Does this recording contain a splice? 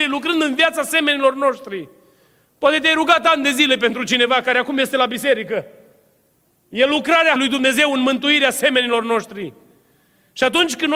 yes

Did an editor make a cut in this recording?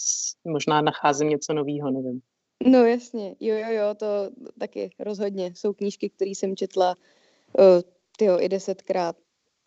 no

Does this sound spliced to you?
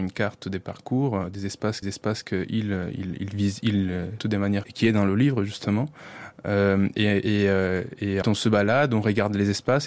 yes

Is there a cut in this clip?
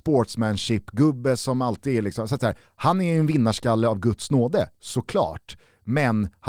no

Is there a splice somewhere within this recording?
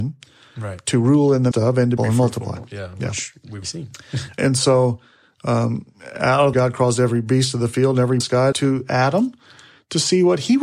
yes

